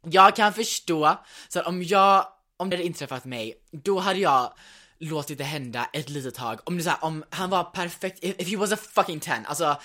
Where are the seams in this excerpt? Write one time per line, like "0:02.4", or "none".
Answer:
0:02.7